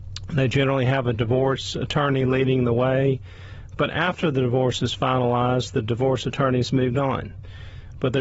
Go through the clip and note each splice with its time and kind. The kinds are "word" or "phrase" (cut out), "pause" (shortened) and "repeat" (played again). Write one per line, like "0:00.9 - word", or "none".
none